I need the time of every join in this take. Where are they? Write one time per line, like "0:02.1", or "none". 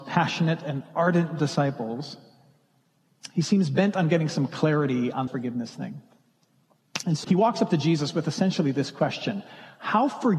0:05.3
0:07.2